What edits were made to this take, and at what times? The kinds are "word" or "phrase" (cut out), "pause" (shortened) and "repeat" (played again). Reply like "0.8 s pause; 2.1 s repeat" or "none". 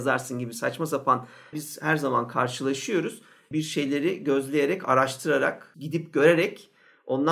1.5 s word